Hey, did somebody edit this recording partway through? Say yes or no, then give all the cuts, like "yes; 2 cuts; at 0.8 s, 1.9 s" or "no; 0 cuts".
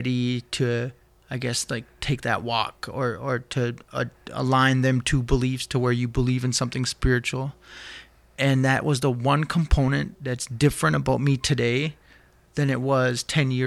no; 0 cuts